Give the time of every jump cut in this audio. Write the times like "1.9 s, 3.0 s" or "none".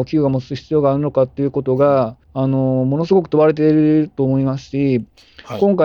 2.2 s

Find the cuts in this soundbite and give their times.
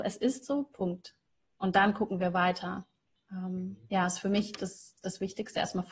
none

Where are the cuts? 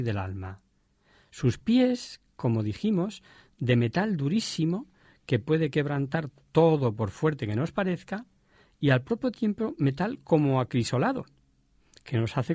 none

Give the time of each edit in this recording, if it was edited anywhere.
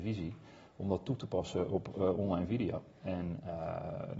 none

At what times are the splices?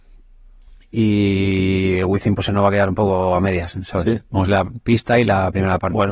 4.5 s

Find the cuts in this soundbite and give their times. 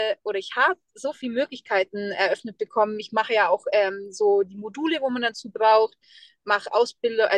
none

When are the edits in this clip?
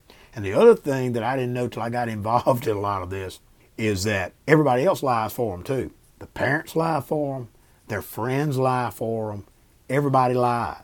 3.6 s, 4.4 s, 6.1 s

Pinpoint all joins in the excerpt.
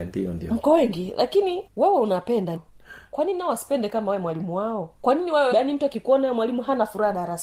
1.7 s, 2.6 s, 4.9 s, 5.5 s

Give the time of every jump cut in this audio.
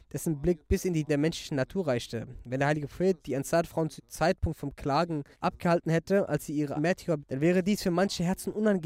1.1 s, 4.0 s, 5.3 s, 6.8 s, 7.2 s

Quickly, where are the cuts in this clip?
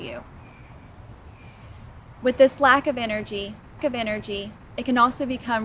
3.8 s

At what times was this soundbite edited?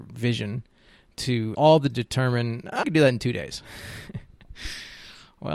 1.5 s, 1.9 s, 2.8 s

